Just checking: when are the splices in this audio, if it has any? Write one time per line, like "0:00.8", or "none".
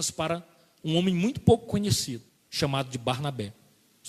0:02.3

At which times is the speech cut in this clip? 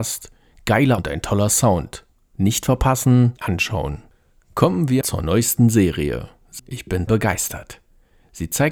0:01.0
0:03.4
0:05.0
0:06.6
0:07.1

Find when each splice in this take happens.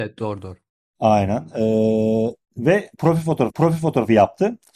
0:02.4
0:03.5

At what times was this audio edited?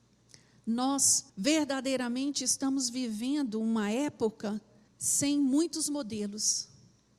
0:01.3
0:04.9

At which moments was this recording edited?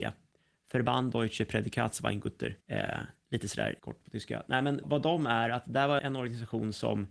0:02.6
0:03.8
0:04.8
0:06.0

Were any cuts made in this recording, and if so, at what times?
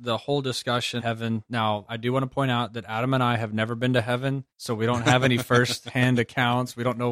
0:01.0
0:01.9
0:04.5

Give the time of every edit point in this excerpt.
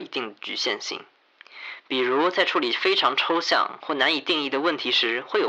none

